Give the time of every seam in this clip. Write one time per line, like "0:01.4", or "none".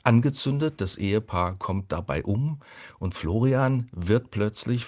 none